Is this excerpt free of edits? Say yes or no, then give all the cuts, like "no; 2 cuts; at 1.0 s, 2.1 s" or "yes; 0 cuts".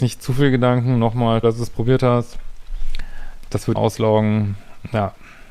no; 2 cuts; at 1.4 s, 3.7 s